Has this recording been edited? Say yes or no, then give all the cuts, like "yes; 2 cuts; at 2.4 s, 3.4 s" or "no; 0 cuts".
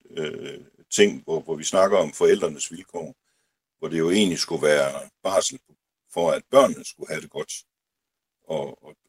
no; 0 cuts